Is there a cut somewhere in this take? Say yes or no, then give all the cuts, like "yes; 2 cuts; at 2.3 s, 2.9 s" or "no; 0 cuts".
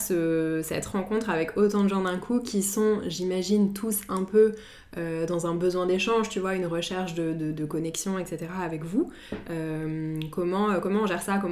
no; 0 cuts